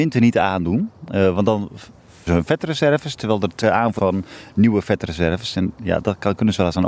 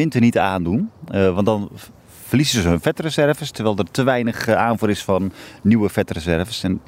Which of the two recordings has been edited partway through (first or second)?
first